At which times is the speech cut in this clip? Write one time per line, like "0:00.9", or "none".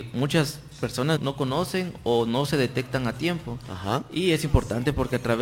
0:01.2